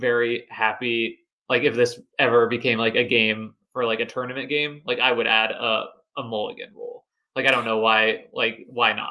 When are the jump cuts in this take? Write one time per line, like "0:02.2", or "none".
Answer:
none